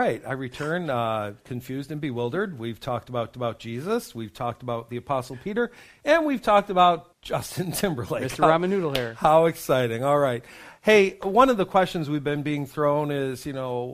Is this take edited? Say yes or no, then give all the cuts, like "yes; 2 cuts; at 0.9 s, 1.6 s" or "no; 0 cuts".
yes; 2 cuts; at 3.3 s, 7.1 s